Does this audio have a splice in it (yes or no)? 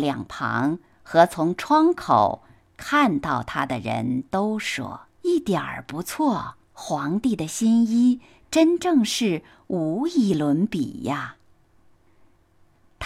yes